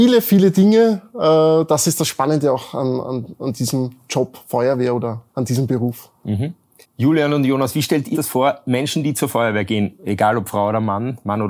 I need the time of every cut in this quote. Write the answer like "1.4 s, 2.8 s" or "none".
5.3 s, 6.8 s, 8.1 s